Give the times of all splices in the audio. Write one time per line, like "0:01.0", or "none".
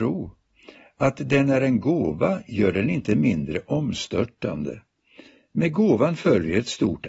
none